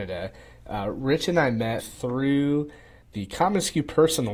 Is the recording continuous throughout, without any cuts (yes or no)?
no